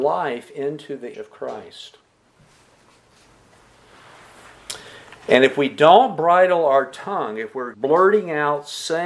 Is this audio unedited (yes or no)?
no